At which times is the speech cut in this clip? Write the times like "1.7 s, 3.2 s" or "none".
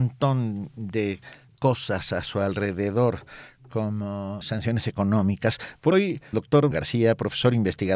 1.5 s, 4.4 s, 5.9 s, 6.3 s, 6.7 s